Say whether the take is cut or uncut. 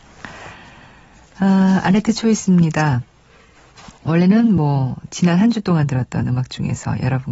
uncut